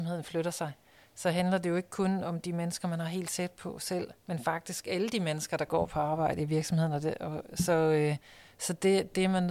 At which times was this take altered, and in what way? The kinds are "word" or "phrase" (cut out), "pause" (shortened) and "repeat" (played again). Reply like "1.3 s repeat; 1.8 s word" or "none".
4.2 s pause